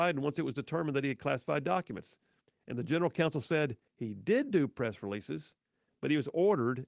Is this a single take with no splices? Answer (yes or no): no